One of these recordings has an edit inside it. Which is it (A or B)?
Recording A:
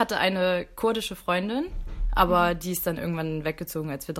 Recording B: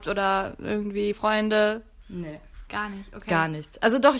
B